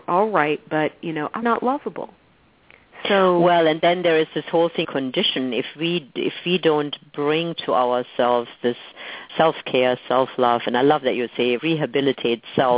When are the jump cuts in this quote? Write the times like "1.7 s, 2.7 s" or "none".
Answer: 1.4 s, 4.8 s, 9.3 s, 11.6 s